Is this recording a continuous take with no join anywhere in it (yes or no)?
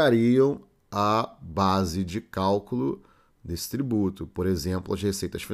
yes